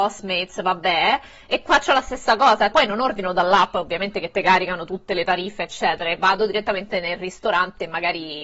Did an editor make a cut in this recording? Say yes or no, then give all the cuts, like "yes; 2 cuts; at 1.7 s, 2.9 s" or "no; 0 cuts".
yes; 1 cut; at 2.7 s